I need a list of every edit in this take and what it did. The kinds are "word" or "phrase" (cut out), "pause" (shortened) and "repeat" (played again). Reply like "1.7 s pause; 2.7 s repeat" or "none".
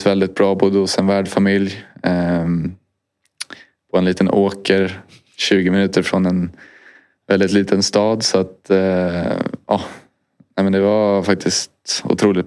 none